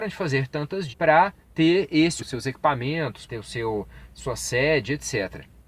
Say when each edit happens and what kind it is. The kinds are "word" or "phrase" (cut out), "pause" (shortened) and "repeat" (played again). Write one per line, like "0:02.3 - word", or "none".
0:00.9 - word
0:01.4 - pause
0:02.2 - phrase
0:03.3 - word